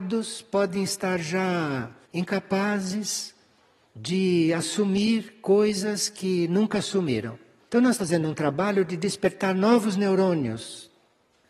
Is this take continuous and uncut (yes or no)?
no